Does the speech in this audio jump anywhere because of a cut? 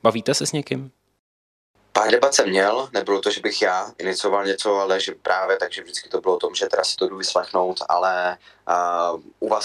no; 0 cuts

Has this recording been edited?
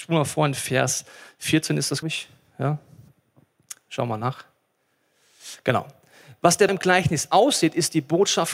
yes; 2 cuts; at 2.0 s, 6.7 s

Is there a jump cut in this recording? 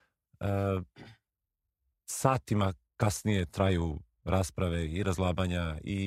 no; 0 cuts

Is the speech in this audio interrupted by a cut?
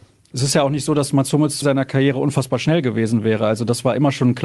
yes; 1 cut; at 1.6 s

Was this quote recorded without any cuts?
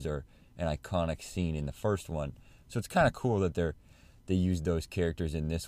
yes; 0 cuts

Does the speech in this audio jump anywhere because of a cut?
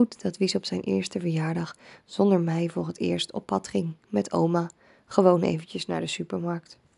no; 0 cuts

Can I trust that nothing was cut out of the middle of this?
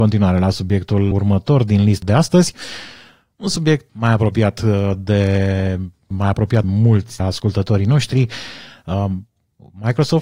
no; 6 cuts; at 1.1 s, 2.0 s, 3.9 s, 6.1 s, 6.6 s, 7.2 s

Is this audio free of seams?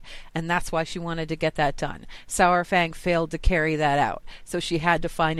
yes; 0 cuts

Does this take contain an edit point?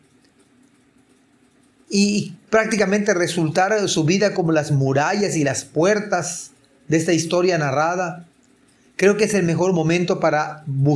no; 0 cuts

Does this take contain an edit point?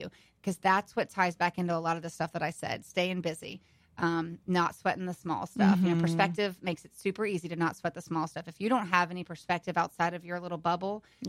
no; 0 cuts

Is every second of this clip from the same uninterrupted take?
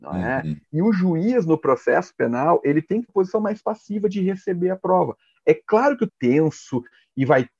no; 2 cuts; at 3.1 s, 6.1 s

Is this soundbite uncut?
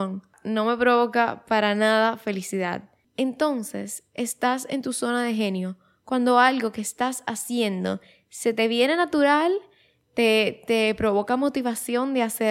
yes; 0 cuts

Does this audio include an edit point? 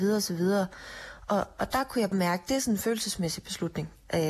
yes; 1 cut; at 2.1 s

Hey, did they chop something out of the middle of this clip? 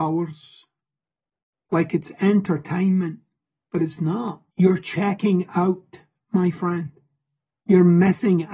yes; 1 cut; at 4.5 s

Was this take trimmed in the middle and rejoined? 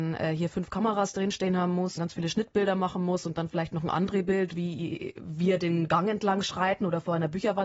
yes; 1 cut; at 2.0 s

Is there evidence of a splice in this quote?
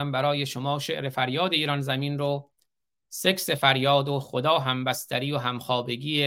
no; 0 cuts

